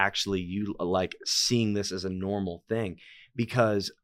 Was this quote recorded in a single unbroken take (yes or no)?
yes